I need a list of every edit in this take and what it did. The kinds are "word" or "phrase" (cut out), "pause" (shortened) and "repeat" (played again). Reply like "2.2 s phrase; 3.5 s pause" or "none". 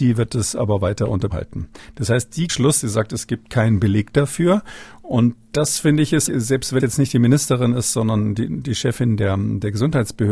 1.3 s word; 2.5 s phrase; 6.3 s word; 6.8 s word